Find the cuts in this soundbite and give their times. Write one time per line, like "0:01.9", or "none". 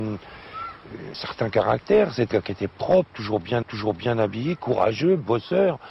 0:01.1
0:02.3
0:03.6